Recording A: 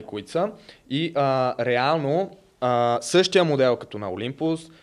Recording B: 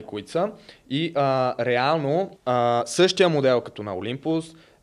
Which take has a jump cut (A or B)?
B